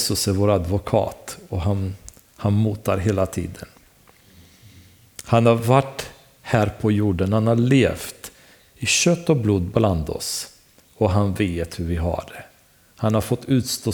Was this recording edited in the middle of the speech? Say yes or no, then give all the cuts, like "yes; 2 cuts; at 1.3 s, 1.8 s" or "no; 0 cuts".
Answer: no; 0 cuts